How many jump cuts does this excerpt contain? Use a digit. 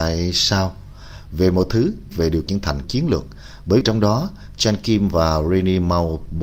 4